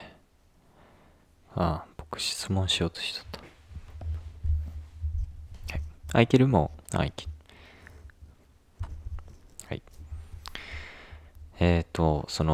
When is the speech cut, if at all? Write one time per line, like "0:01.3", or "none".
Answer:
0:06.8

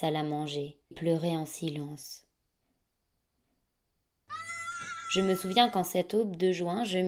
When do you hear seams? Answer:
0:00.9

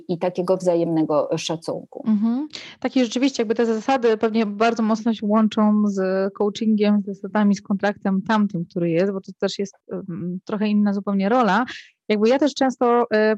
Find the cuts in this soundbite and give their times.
none

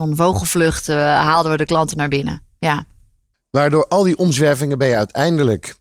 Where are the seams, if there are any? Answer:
none

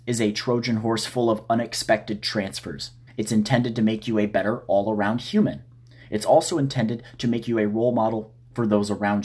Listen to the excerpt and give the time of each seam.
0:03.1

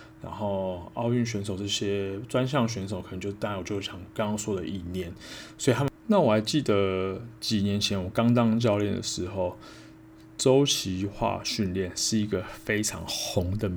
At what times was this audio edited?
0:06.0

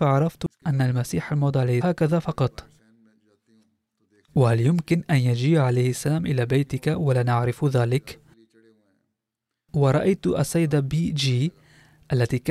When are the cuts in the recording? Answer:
0:01.8

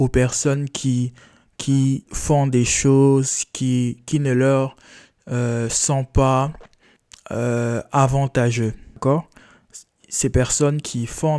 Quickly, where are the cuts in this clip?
none

